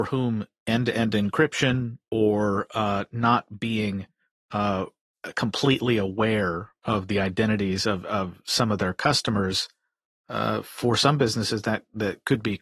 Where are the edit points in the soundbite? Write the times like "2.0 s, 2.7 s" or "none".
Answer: none